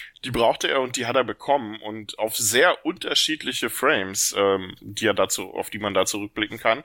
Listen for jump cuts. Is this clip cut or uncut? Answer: uncut